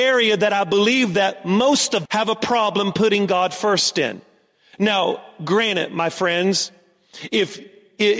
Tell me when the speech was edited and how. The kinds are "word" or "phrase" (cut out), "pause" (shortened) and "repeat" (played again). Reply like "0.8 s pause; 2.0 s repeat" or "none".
2.1 s word